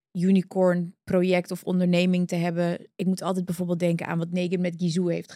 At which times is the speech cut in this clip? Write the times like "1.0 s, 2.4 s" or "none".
none

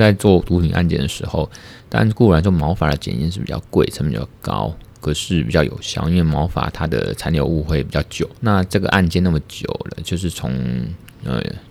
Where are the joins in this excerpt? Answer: 1.8 s, 8.4 s

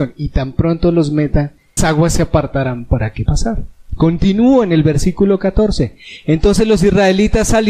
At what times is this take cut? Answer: 1.8 s, 3.3 s

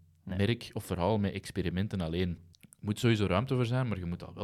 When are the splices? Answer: 2.5 s

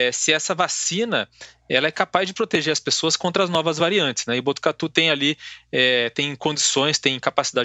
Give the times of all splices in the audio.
none

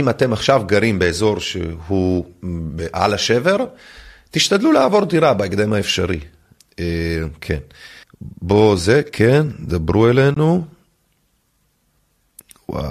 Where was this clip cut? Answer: 6.6 s, 8.0 s

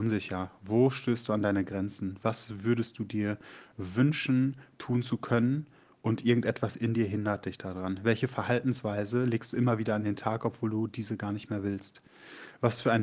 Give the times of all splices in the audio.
none

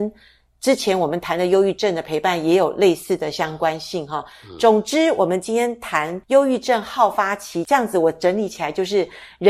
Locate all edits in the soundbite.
6.2 s

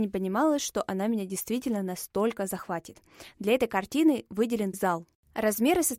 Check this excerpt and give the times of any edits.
4.7 s

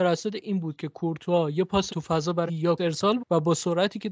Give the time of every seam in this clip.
1.9 s, 2.5 s, 2.8 s, 3.2 s

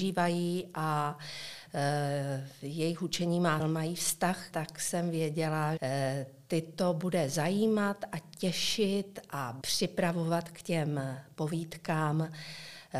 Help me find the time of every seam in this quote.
3.6 s, 4.5 s, 5.8 s, 9.6 s

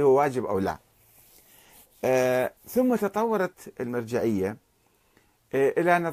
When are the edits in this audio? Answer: 2.6 s

